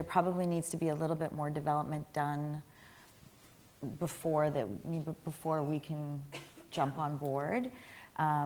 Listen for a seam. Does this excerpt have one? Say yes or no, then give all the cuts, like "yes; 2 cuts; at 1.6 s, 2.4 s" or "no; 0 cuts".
no; 0 cuts